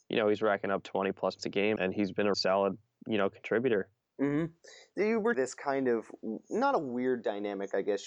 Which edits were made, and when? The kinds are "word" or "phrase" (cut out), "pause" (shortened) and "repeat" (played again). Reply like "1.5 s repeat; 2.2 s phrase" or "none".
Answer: 1.4 s word; 1.8 s word; 2.3 s word; 4.0 s pause; 5.3 s word